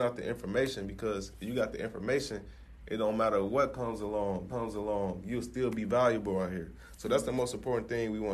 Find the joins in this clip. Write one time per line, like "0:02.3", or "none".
0:04.5